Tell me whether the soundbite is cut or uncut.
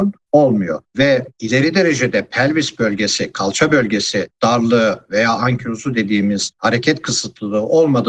uncut